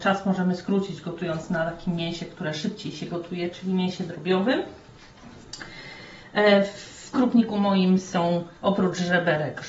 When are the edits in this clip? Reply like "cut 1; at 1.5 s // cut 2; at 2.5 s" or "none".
cut 1; at 7.1 s // cut 2; at 8.6 s